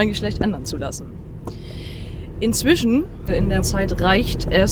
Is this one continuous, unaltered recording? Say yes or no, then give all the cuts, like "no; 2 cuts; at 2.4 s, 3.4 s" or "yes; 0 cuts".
no; 2 cuts; at 3.3 s, 3.6 s